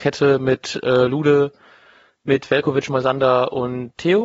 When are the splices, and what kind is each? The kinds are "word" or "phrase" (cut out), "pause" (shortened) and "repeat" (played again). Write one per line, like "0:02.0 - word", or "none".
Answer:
none